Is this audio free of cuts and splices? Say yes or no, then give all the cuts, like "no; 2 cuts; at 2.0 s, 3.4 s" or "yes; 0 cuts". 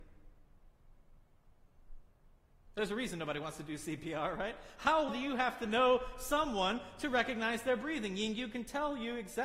no; 1 cut; at 5.1 s